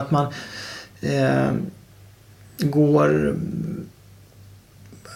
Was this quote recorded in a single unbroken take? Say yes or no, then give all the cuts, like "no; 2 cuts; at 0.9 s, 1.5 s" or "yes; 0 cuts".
yes; 0 cuts